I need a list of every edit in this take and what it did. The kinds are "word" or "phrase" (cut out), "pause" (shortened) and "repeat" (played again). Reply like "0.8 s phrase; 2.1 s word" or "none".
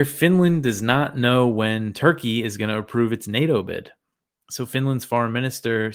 none